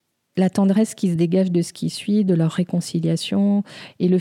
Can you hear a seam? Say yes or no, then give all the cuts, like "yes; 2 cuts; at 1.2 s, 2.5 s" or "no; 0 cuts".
no; 0 cuts